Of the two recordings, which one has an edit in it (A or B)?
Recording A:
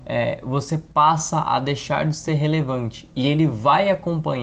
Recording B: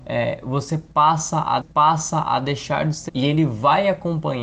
B